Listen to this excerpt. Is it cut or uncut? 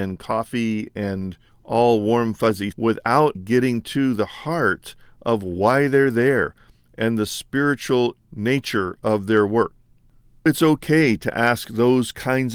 cut